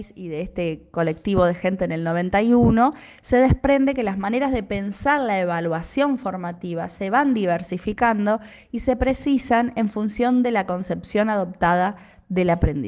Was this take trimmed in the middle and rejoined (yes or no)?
no